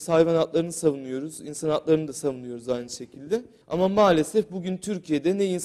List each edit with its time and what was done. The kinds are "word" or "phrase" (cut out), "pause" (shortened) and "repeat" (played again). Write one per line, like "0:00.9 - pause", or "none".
0:03.6 - pause